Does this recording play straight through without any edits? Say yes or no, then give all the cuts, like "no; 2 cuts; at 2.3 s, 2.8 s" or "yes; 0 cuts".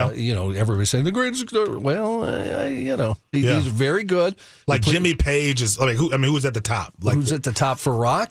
yes; 0 cuts